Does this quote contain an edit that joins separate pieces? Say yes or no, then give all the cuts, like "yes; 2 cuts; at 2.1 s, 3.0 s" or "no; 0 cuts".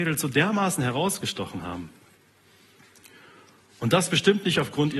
no; 0 cuts